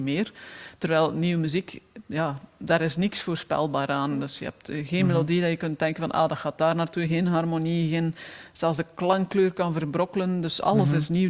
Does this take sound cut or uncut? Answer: uncut